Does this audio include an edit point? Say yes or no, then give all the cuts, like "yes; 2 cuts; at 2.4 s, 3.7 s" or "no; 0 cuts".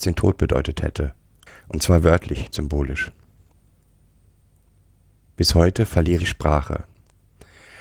yes; 2 cuts; at 2.5 s, 6.2 s